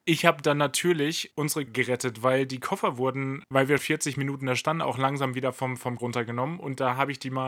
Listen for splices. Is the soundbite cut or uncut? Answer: cut